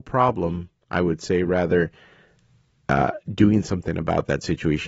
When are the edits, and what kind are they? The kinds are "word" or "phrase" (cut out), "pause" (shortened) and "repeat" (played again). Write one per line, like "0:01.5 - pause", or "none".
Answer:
none

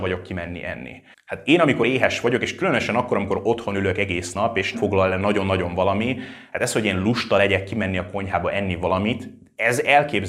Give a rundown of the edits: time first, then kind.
0:04.7 - word

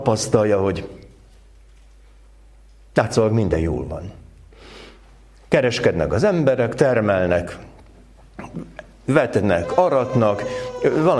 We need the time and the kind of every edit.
none

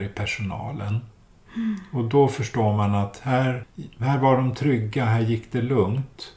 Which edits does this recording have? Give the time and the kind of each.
none

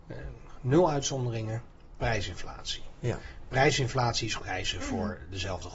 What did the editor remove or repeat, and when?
0:02.0 - word
0:04.4 - phrase

